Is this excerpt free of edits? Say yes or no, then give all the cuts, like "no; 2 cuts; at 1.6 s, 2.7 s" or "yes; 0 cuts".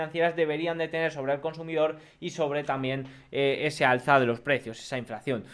yes; 0 cuts